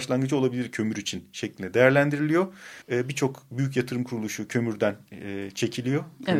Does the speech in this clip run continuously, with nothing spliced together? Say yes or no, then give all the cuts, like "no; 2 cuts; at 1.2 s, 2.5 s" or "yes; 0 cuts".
no; 1 cut; at 2.8 s